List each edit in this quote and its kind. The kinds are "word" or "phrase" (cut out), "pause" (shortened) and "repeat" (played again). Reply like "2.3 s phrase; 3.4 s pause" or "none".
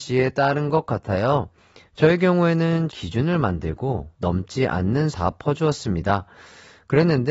1.6 s pause; 2.9 s word; 4.1 s word; 5.1 s word